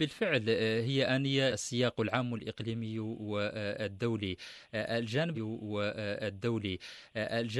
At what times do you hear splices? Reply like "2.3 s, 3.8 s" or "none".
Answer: 1.5 s, 5.3 s

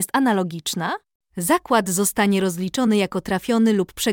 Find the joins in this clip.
none

